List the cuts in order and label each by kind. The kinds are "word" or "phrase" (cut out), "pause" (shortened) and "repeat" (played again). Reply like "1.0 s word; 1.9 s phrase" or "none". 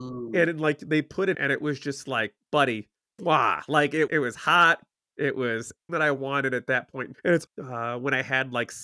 1.3 s word; 3.2 s word; 4.1 s word; 5.9 s word; 7.1 s word; 7.5 s word